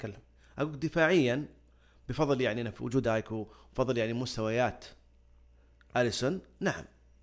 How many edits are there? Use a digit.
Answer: 1